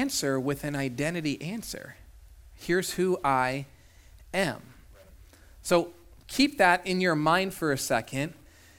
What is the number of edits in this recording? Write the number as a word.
zero